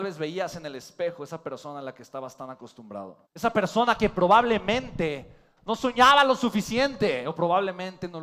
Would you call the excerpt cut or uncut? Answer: cut